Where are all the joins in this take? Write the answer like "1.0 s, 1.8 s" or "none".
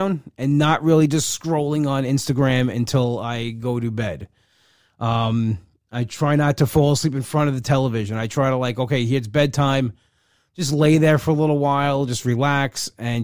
none